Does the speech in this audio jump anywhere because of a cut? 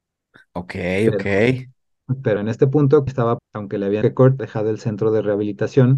yes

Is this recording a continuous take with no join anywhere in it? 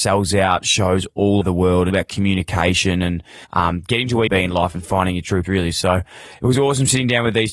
no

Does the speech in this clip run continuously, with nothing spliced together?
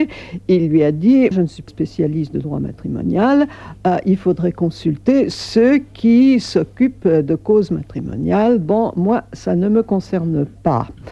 no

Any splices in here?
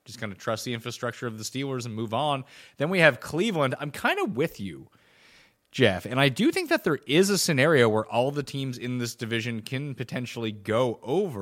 no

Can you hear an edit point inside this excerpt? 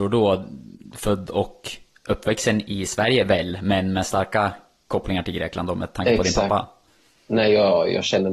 no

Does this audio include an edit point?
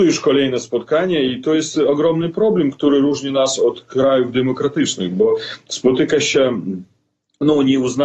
no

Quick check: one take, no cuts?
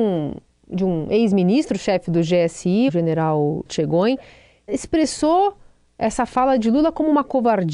no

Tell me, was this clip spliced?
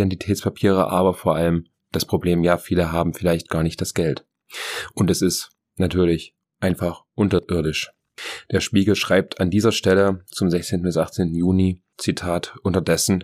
no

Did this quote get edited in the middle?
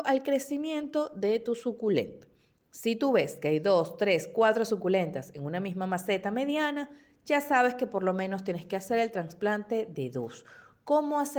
no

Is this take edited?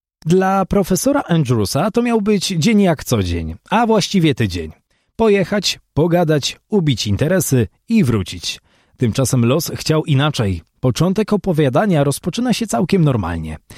no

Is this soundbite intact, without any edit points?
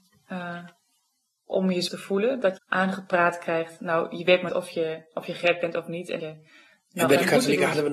no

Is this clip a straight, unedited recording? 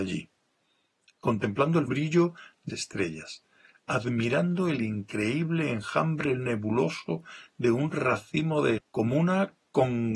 no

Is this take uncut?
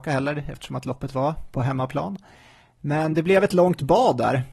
yes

